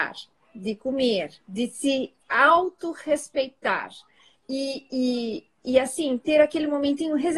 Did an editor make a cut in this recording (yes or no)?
no